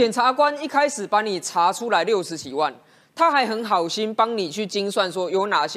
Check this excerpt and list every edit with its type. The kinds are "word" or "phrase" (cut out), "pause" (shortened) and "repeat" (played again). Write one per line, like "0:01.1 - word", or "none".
none